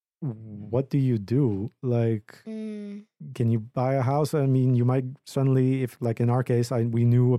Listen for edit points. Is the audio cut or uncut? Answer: uncut